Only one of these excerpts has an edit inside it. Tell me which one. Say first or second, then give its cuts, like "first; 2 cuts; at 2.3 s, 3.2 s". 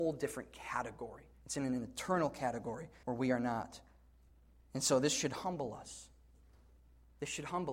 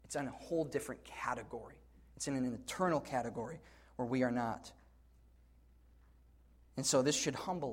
first; 3 cuts; at 1.3 s, 3.0 s, 4.3 s